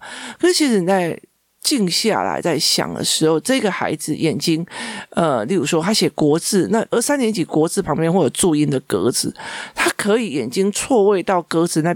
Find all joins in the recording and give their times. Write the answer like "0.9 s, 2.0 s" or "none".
none